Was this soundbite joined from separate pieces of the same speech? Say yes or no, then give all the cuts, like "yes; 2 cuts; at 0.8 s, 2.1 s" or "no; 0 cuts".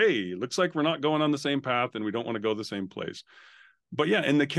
no; 0 cuts